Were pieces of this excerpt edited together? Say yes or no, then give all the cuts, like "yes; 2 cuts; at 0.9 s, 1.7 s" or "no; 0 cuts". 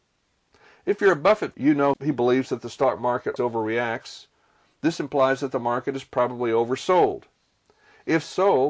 yes; 2 cuts; at 1.5 s, 3.4 s